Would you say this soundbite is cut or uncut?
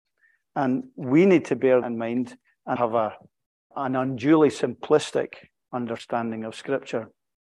cut